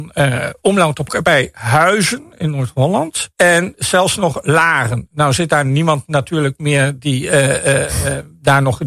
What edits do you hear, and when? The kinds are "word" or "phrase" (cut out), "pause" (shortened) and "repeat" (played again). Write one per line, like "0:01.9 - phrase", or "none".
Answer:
0:01.1 - phrase
0:03.3 - pause